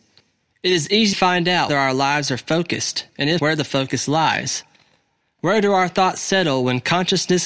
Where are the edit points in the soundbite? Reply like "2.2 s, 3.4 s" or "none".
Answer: 1.1 s, 1.7 s, 3.4 s